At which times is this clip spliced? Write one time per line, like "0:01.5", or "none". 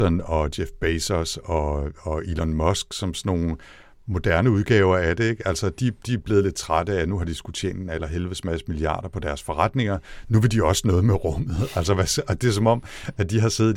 none